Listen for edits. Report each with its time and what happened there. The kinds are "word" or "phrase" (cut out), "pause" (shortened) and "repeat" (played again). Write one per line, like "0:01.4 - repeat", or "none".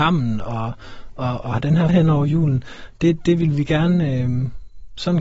0:01.4 - word
0:01.9 - phrase